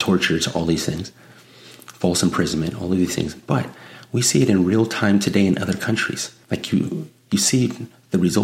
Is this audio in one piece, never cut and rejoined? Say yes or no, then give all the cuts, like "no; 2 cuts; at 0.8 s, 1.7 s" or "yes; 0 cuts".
no; 1 cut; at 6.4 s